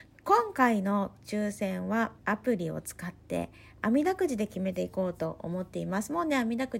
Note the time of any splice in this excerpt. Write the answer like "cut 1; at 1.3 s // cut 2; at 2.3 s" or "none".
cut 1; at 2.2 s